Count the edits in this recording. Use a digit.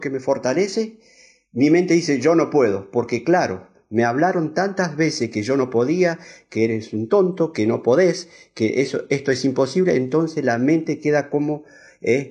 0